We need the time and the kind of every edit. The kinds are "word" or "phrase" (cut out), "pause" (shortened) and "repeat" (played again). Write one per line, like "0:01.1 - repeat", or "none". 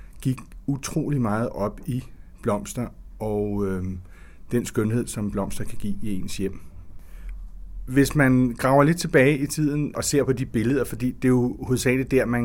none